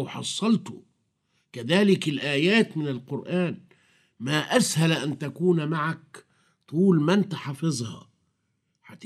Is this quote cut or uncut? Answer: uncut